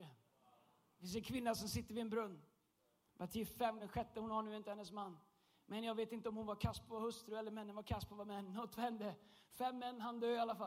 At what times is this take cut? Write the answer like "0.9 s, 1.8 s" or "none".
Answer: 3.8 s

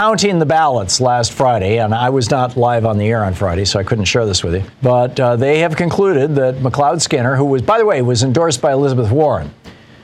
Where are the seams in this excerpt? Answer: 4.7 s

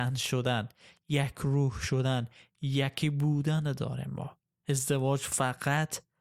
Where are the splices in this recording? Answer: none

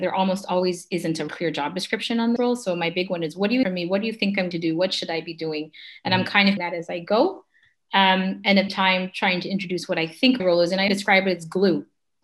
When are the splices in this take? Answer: 1.3 s, 2.4 s, 3.6 s, 4.5 s, 6.6 s, 8.7 s, 10.4 s, 10.9 s

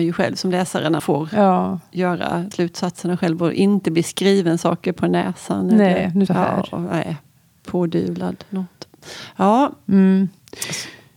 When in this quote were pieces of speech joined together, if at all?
1.0 s, 2.5 s, 6.3 s

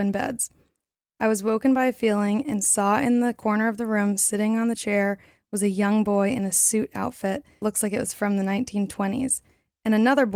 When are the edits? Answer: 7.6 s

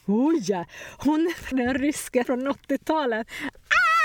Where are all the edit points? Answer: 1.5 s, 2.2 s

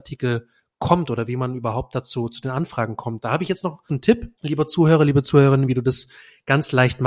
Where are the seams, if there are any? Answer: 3.9 s, 4.4 s

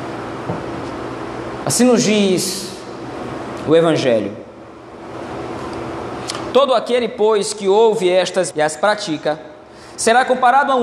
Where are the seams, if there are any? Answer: 8.5 s

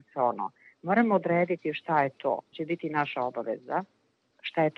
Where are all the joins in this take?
2.5 s

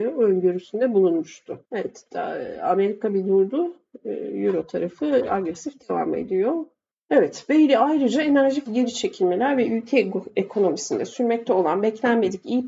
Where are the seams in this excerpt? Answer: 1.6 s, 6.9 s, 8.7 s

